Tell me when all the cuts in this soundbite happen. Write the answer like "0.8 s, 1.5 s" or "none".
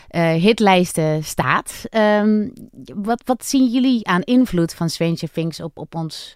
none